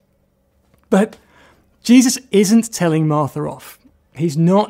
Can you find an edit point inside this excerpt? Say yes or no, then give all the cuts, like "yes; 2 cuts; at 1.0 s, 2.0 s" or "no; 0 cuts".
no; 0 cuts